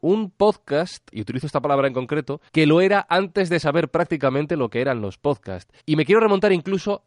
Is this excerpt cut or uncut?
cut